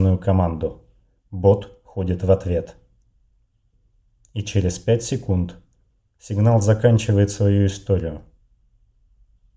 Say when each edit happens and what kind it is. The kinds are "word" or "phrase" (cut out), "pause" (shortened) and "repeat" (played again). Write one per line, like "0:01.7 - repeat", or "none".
none